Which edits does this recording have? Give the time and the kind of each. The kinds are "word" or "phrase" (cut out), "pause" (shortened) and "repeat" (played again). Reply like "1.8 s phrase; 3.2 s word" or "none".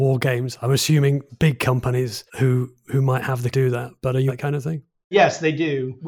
1.3 s word; 2.3 s pause; 3.5 s phrase; 4.3 s phrase